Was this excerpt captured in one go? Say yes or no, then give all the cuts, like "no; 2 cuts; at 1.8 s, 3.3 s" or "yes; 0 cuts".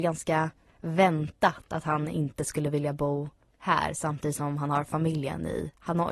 yes; 0 cuts